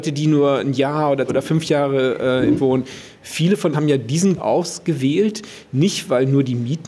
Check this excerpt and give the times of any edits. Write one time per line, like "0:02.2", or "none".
0:01.3
0:02.6
0:03.7
0:04.4